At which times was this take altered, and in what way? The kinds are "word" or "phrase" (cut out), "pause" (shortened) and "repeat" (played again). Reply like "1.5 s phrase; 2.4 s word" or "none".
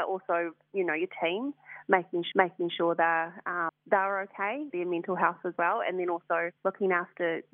2.3 s repeat; 3.7 s word; 4.7 s word; 5.5 s phrase; 6.6 s pause